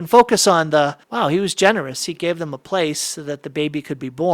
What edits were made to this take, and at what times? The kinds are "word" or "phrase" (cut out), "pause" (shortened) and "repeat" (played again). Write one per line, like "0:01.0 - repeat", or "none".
0:01.0 - pause